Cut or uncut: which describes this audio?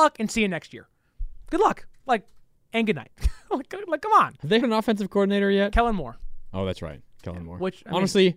cut